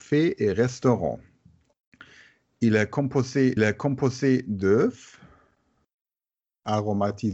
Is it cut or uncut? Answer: cut